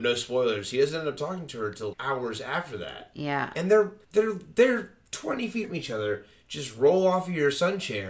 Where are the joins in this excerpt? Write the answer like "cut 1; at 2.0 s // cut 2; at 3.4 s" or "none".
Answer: cut 1; at 1.9 s // cut 2; at 4.0 s // cut 3; at 5.6 s